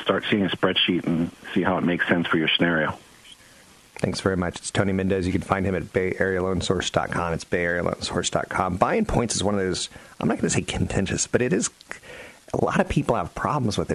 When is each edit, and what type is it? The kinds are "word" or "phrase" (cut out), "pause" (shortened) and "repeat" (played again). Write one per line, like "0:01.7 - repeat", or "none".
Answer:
none